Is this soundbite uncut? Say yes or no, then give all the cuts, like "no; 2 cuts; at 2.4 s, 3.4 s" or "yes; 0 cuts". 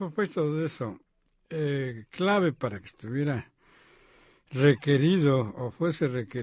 yes; 0 cuts